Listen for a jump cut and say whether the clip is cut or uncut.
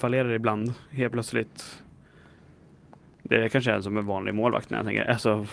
uncut